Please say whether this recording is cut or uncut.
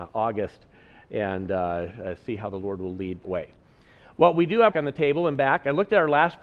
cut